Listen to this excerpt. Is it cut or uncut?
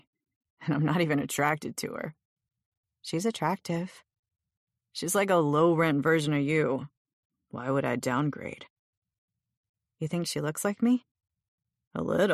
uncut